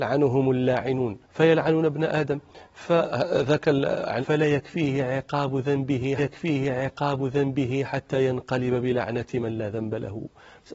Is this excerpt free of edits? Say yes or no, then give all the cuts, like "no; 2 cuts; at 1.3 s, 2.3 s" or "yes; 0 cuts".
no; 3 cuts; at 1.2 s, 4.2 s, 6.2 s